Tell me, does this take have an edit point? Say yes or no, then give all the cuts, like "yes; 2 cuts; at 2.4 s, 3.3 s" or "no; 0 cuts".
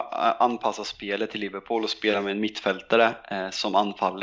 no; 0 cuts